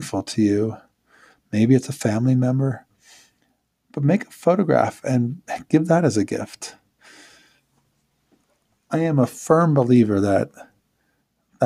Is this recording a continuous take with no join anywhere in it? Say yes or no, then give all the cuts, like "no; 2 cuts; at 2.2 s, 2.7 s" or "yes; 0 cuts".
yes; 0 cuts